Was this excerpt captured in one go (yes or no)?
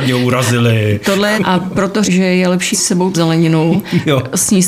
no